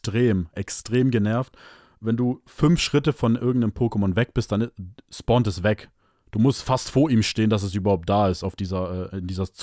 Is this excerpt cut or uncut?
uncut